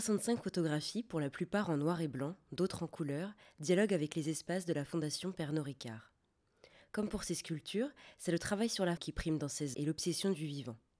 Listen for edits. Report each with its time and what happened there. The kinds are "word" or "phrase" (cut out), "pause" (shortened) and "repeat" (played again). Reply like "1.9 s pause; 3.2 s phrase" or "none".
9.0 s word; 9.7 s word